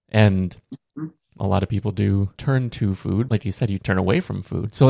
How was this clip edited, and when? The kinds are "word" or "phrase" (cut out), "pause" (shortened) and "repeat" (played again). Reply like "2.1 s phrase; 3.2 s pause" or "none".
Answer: 1.4 s word; 2.4 s word; 3.3 s word; 3.8 s word